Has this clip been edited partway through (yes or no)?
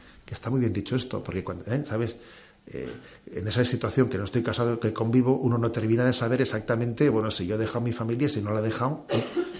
no